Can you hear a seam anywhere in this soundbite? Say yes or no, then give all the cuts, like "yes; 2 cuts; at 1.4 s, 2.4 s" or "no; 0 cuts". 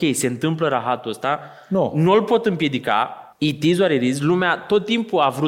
yes; 1 cut; at 3.3 s